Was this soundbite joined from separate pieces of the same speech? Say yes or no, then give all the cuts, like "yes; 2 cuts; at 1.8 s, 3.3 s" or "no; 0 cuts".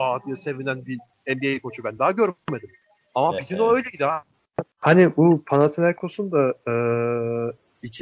no; 0 cuts